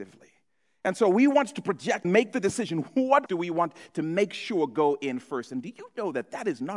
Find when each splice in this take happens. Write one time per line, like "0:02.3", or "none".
0:02.0
0:03.3